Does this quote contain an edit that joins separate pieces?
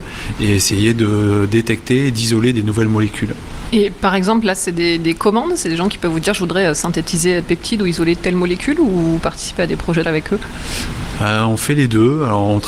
yes; 2 cuts; at 7.4 s, 10.0 s

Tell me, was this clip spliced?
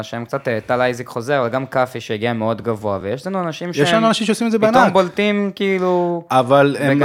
no; 0 cuts

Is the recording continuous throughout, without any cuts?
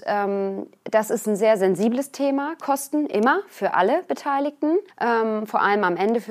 no; 1 cut; at 4.9 s

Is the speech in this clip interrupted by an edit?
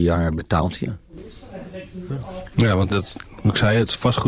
yes; 1 cut; at 2.9 s

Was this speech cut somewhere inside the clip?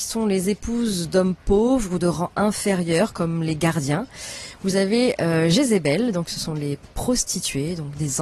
no; 0 cuts

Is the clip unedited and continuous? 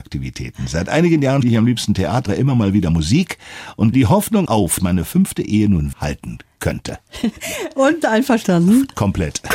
no; 7 cuts; at 1.4 s, 2.3 s, 3.9 s, 4.5 s, 4.8 s, 5.9 s, 8.0 s

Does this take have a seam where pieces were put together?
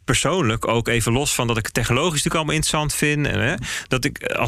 no; 0 cuts

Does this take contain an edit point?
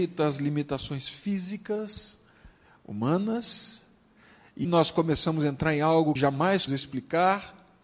yes; 3 cuts; at 4.6 s, 6.2 s, 6.7 s

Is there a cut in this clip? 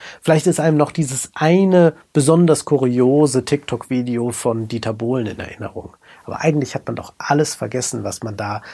no; 0 cuts

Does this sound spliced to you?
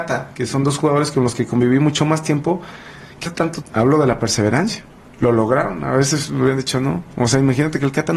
yes; 2 cuts; at 3.3 s, 3.6 s

